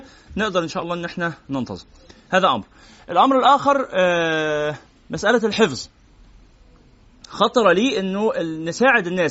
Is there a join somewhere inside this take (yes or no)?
no